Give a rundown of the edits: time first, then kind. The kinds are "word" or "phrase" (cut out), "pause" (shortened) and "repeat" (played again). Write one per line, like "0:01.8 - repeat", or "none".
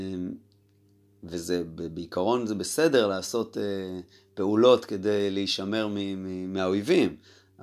none